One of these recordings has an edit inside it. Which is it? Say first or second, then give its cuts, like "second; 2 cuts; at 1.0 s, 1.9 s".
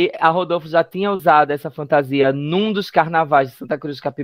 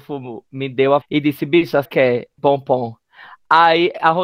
second; 3 cuts; at 1.0 s, 1.8 s, 2.4 s